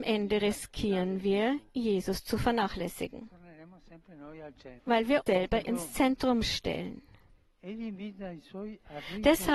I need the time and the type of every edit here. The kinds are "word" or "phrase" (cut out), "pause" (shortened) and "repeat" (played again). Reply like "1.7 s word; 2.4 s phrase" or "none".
4.8 s pause; 5.3 s word; 5.7 s word